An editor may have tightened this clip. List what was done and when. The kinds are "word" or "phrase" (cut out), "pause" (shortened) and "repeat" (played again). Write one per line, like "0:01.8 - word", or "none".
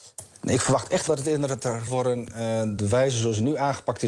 0:01.1 - word
0:01.9 - phrase
0:02.8 - word